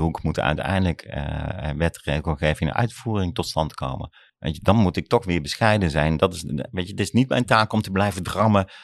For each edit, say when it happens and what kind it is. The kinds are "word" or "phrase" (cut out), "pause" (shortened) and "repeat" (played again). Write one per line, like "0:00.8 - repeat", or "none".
0:04.3 - pause